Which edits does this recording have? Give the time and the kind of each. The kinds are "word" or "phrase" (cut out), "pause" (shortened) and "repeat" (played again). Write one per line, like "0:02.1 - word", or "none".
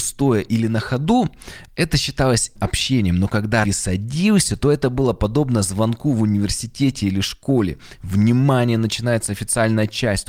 0:02.5 - word
0:03.6 - word